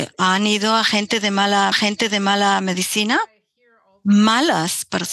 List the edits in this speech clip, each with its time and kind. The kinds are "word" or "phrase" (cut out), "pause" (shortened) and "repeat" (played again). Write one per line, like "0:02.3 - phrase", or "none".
0:01.7 - repeat